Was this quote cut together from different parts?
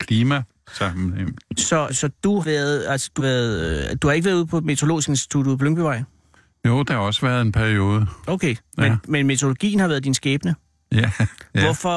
yes; 4 cuts; at 1.9 s, 2.4 s, 3.2 s, 6.9 s

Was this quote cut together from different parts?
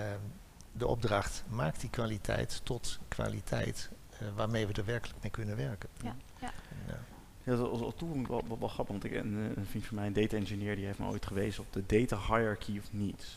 no; 0 cuts

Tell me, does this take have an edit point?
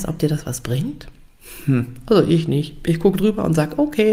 no; 0 cuts

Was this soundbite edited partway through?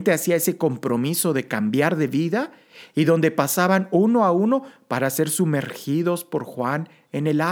no; 0 cuts

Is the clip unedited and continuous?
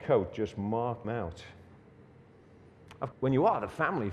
no; 2 cuts; at 1.0 s, 3.1 s

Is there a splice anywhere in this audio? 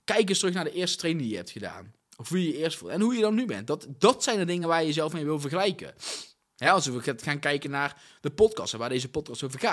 no; 0 cuts

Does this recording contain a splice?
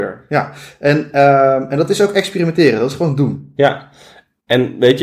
no; 0 cuts

